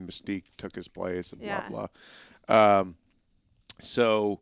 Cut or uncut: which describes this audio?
uncut